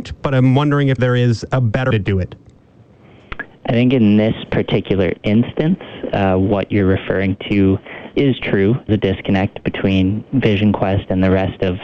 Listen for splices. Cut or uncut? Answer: cut